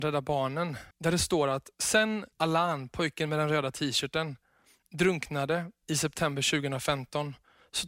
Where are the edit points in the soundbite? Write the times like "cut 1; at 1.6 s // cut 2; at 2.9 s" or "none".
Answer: cut 1; at 0.9 s // cut 2; at 2.3 s